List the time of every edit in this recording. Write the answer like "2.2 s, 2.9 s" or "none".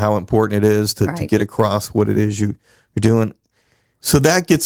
none